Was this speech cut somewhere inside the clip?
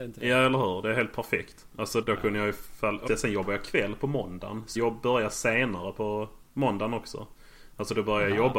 yes; 3 cuts; at 2.0 s, 3.1 s, 4.8 s

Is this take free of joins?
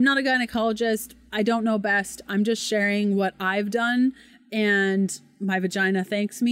yes; 0 cuts

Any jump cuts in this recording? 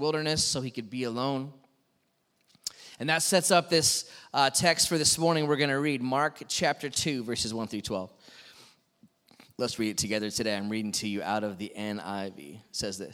no; 0 cuts

